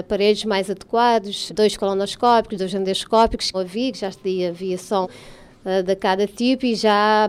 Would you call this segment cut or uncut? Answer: cut